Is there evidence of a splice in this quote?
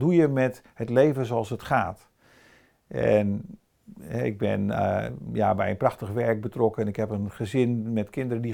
no; 0 cuts

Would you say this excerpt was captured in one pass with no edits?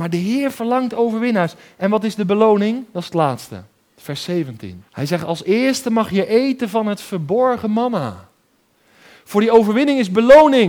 no; 1 cut; at 4.9 s

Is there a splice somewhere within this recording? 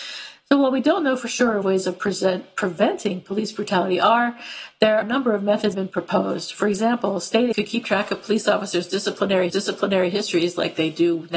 yes; 5 cuts; at 1.6 s, 5.0 s, 5.7 s, 7.5 s, 9.5 s

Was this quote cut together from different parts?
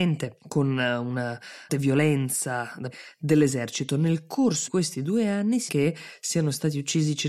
yes; 4 cuts; at 1.7 s, 2.9 s, 4.7 s, 5.7 s

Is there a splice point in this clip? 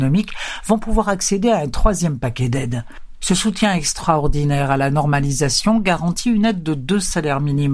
no; 0 cuts

